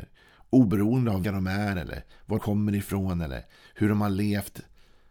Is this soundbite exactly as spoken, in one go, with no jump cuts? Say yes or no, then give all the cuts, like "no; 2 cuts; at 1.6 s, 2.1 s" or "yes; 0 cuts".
no; 2 cuts; at 1.2 s, 2.4 s